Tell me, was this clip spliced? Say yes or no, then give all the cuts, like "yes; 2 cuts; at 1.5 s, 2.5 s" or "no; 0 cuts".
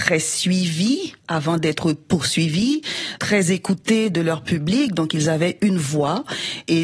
yes; 1 cut; at 1.2 s